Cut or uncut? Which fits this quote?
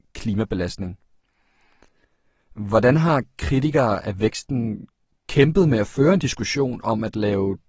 uncut